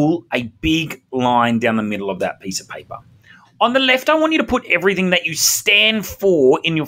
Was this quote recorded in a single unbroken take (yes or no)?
yes